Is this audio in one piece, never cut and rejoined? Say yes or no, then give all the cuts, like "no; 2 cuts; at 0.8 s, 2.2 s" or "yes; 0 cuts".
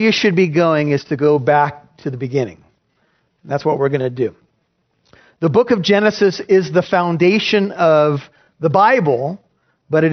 yes; 0 cuts